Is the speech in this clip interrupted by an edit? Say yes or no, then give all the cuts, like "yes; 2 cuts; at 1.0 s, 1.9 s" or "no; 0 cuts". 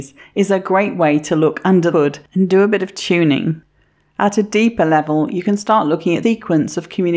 yes; 2 cuts; at 1.9 s, 6.2 s